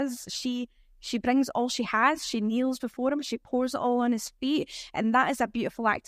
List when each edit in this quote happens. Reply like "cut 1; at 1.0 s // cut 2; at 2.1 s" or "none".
none

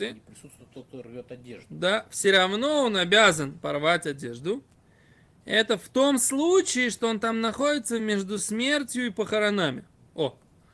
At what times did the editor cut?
none

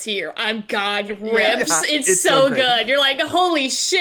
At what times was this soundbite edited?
cut 1; at 1.1 s

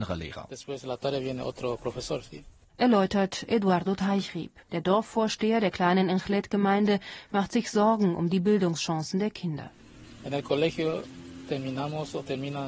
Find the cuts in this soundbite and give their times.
cut 1; at 4.6 s

